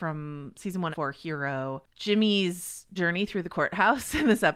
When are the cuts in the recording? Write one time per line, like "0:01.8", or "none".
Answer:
0:00.9
0:01.9
0:03.0